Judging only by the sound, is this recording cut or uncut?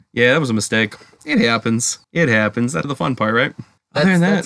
cut